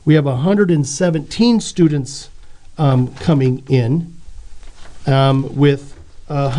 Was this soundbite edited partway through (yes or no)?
no